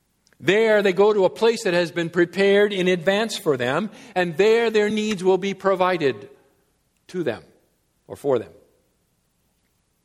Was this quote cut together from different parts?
no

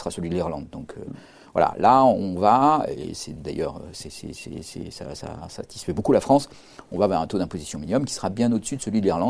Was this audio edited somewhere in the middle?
no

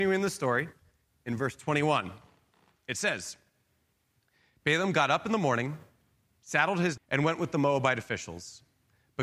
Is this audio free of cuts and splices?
no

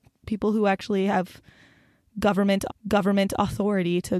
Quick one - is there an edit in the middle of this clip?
yes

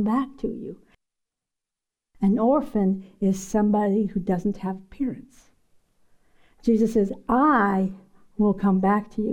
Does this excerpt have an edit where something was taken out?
no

